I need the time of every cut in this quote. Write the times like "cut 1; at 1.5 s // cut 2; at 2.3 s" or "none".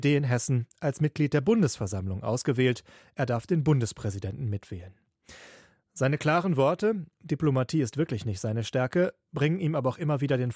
cut 1; at 7.1 s